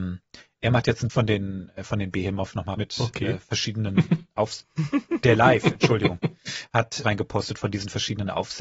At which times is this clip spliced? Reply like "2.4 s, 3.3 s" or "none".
1.1 s, 2.7 s, 7.0 s